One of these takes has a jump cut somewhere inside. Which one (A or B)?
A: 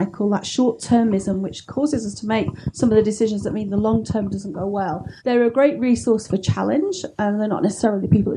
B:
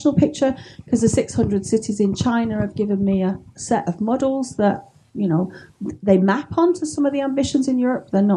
A